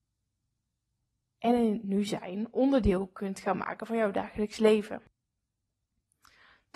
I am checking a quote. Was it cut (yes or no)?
no